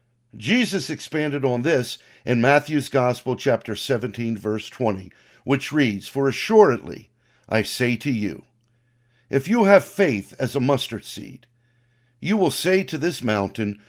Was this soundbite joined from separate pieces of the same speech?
no; 0 cuts

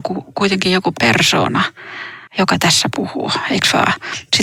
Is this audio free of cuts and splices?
no; 1 cut; at 2.3 s

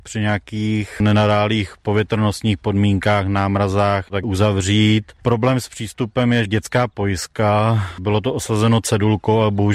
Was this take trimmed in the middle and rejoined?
yes; 2 cuts; at 4.2 s, 6.5 s

